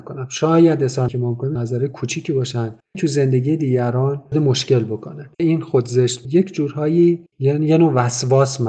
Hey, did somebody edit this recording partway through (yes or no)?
yes